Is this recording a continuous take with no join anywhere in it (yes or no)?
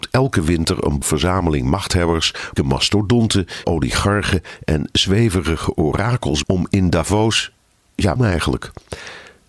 no